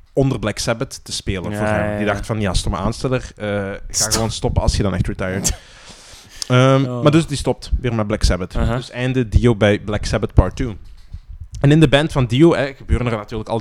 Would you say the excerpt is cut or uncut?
uncut